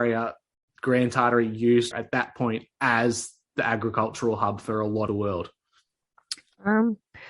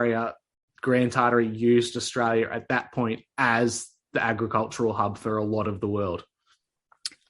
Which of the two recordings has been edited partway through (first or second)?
first